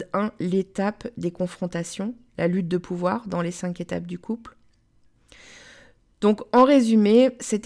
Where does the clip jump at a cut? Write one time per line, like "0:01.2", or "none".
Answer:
none